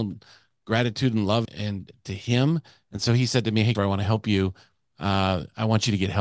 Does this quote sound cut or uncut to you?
cut